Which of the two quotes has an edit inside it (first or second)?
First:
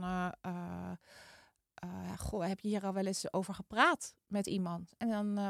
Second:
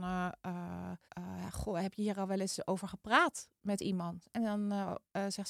second